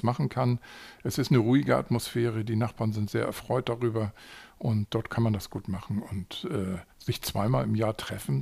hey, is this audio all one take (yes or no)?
no